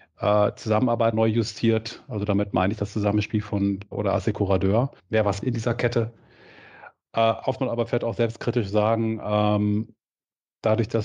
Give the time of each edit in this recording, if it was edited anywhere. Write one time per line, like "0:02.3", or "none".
0:01.1
0:03.9
0:05.0
0:05.4
0:07.6